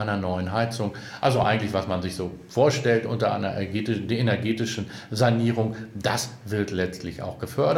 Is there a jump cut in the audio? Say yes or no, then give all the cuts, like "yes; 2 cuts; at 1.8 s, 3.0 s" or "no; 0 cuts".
no; 0 cuts